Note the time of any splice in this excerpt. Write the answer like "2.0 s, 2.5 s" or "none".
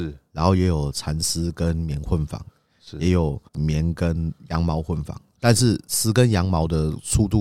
3.5 s